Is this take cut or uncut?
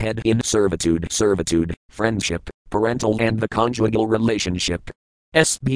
cut